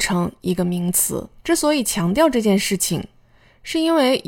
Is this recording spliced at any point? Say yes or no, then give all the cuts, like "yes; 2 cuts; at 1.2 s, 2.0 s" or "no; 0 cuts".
yes; 1 cut; at 1.4 s